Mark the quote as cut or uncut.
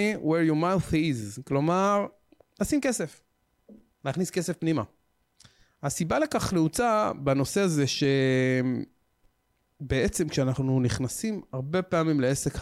uncut